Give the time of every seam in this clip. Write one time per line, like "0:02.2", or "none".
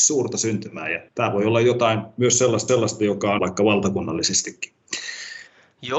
0:01.1
0:02.7
0:03.4